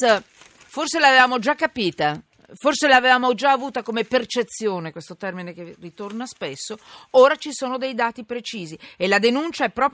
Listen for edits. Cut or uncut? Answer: uncut